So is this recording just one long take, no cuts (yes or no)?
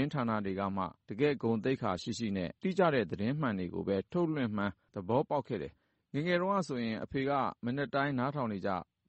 no